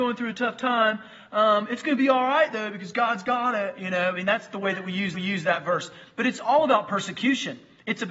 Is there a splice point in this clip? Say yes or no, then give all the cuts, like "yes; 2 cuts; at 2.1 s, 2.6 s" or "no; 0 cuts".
yes; 1 cut; at 5.1 s